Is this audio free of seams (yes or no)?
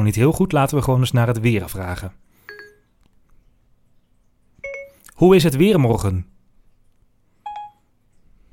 yes